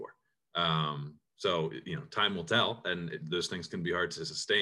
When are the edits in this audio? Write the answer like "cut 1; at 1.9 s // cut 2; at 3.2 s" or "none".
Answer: cut 1; at 1.3 s